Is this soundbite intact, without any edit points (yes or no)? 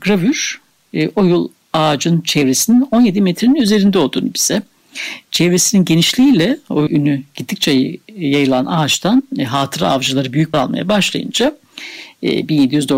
no